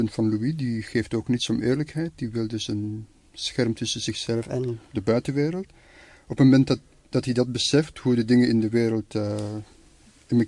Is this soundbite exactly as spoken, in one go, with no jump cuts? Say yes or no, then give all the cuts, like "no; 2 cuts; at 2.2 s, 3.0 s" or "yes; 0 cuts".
yes; 0 cuts